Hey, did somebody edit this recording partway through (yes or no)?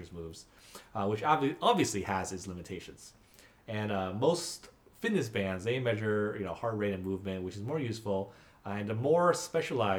no